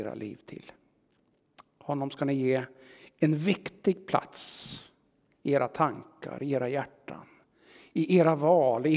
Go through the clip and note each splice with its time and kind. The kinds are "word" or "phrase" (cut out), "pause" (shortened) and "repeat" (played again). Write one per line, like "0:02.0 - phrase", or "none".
none